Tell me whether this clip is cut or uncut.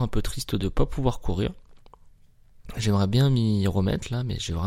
uncut